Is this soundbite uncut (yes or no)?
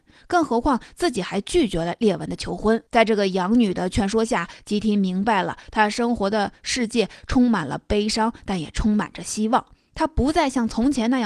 no